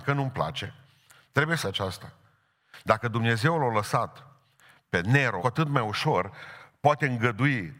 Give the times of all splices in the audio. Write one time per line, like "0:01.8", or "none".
0:01.6
0:05.4